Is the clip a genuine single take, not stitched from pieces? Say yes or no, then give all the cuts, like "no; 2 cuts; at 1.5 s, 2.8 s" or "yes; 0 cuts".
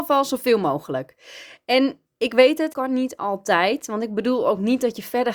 no; 2 cuts; at 2.1 s, 2.7 s